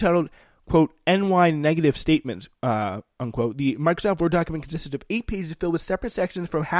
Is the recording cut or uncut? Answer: cut